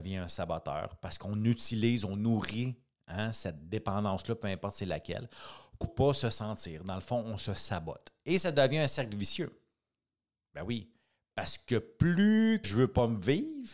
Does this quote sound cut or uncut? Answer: cut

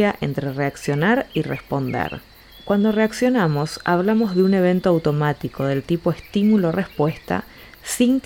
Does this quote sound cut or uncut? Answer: uncut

